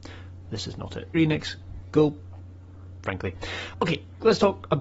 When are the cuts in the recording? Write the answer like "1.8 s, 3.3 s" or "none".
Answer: 1.1 s, 3.0 s, 3.7 s

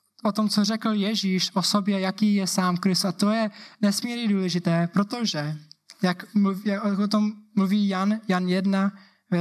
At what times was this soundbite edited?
none

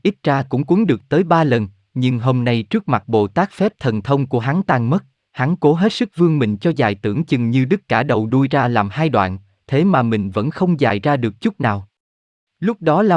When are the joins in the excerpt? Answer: none

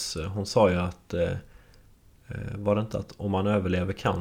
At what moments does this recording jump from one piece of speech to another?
none

